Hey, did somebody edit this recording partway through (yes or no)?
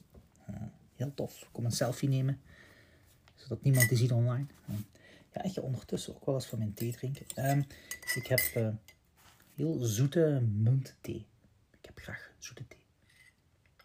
no